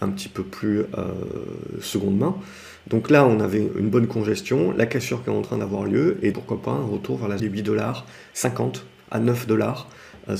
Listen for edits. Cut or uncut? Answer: cut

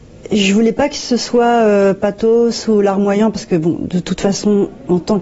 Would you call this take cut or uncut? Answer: uncut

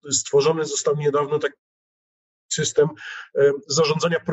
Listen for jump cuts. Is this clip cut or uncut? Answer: uncut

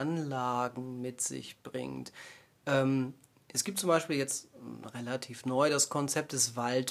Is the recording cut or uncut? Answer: uncut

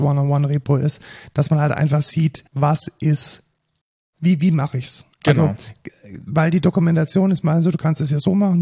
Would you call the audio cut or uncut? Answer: cut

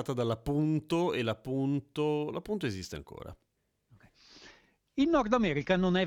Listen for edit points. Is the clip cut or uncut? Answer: uncut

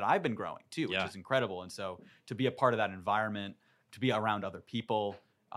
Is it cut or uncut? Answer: uncut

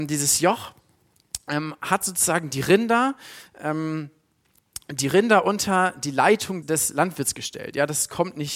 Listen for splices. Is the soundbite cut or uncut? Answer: cut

